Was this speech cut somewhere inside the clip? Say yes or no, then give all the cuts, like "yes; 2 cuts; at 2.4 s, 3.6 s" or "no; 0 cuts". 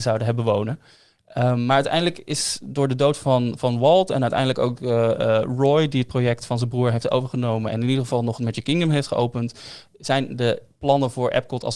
no; 0 cuts